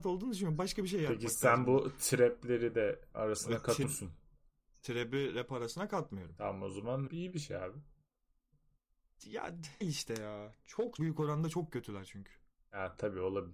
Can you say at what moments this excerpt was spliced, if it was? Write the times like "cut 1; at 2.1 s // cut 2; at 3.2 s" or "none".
cut 1; at 3.1 s // cut 2; at 3.8 s // cut 3; at 7.1 s // cut 4; at 9.8 s // cut 5; at 11.0 s